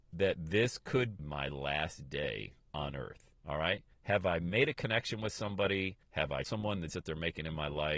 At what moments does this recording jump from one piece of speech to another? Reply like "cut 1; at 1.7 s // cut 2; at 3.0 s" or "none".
cut 1; at 1.2 s // cut 2; at 3.4 s // cut 3; at 3.9 s // cut 4; at 6.0 s // cut 5; at 6.4 s // cut 6; at 6.9 s

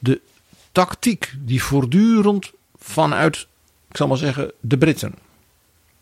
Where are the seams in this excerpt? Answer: none

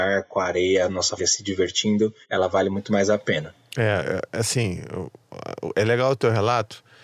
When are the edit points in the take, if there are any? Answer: cut 1; at 1.2 s // cut 2; at 2.2 s

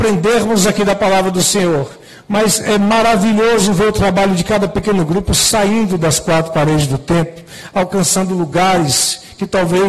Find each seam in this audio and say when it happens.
none

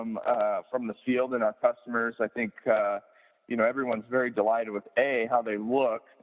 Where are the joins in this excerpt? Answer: none

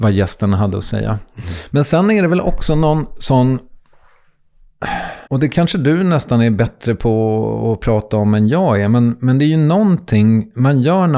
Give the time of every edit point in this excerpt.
cut 1; at 5.3 s

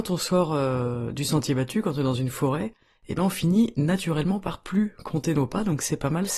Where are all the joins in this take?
none

